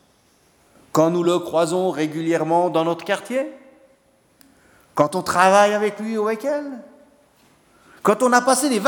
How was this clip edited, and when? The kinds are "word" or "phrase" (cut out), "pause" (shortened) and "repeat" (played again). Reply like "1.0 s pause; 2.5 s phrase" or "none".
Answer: none